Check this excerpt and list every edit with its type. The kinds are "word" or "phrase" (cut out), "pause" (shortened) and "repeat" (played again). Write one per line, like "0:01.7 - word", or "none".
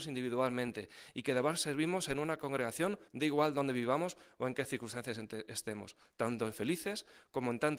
0:03.1 - word